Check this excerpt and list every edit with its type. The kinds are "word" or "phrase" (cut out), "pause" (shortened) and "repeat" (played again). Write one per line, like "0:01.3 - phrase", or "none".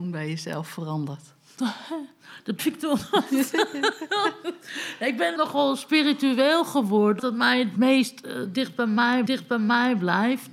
0:02.6 - word
0:05.4 - word
0:07.2 - word
0:07.8 - word
0:09.3 - repeat

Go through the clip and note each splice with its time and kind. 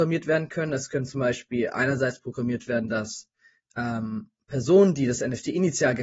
none

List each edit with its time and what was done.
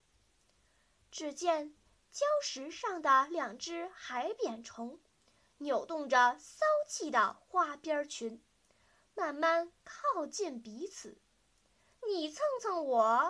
none

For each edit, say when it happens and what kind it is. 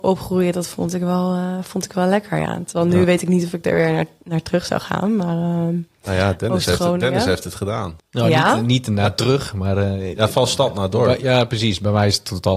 0:08.0 - pause

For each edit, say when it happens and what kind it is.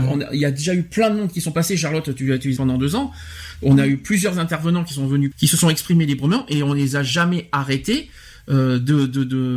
0:02.6 - phrase
0:05.3 - word

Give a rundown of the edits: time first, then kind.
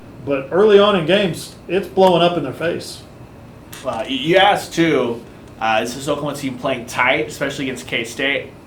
none

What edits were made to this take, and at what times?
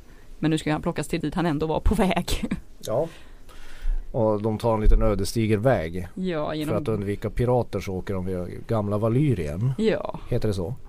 0:01.2 - word

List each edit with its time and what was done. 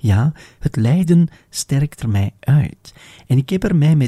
0:02.0 - phrase

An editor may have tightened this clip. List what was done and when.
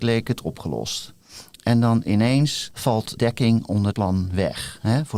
0:03.2 - word
0:03.9 - word

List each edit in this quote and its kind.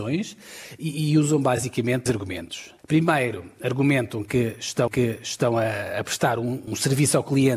0:02.1 - word
0:02.8 - pause
0:04.9 - repeat
0:06.7 - word

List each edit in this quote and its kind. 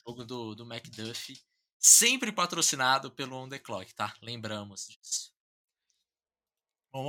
none

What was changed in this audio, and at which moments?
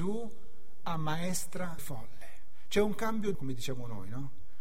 0:01.8 - word
0:03.3 - word

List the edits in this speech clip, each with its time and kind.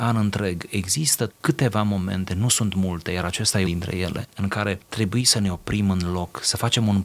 0:01.3 - word
0:03.6 - word
0:04.9 - word

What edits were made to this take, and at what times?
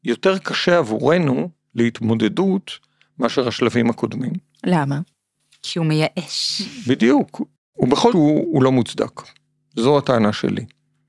0:08.1 - phrase

